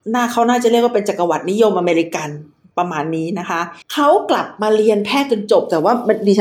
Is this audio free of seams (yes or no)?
no